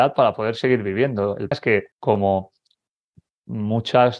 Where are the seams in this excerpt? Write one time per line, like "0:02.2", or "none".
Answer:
0:01.5
0:01.9